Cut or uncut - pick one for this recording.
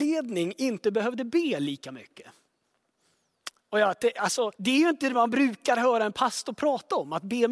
cut